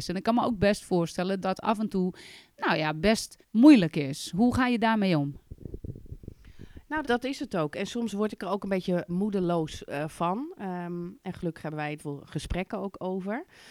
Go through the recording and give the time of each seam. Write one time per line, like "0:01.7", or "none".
0:01.4
0:03.4
0:07.0
0:09.1
0:12.0